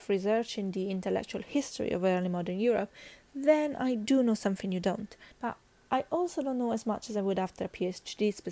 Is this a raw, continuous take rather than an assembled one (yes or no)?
no